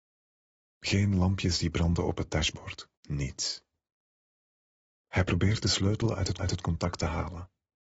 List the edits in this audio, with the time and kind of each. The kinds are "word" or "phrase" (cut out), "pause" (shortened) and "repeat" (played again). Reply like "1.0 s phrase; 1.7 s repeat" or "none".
3.0 s pause; 6.4 s repeat